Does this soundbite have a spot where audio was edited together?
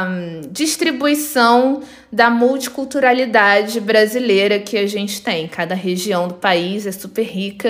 no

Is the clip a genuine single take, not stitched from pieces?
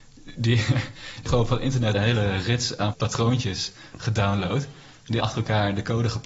no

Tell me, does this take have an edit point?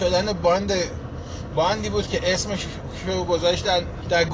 no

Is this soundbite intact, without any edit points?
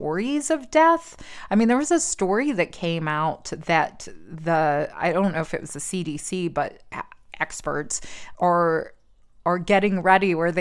no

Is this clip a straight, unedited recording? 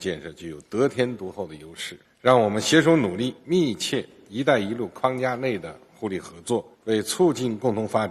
no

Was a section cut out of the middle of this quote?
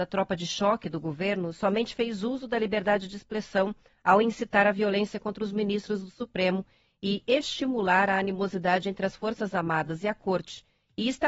no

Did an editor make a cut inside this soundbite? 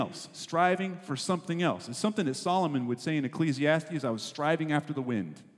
no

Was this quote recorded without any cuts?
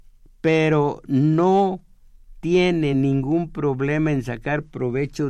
yes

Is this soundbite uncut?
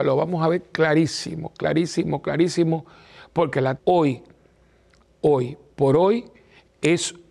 no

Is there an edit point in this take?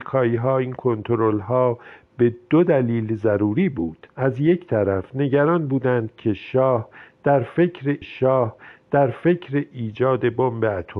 yes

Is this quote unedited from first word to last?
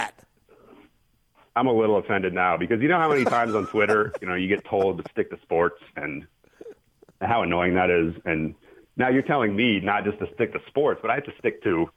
yes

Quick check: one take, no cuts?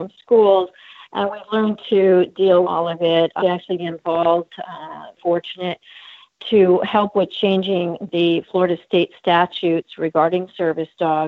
no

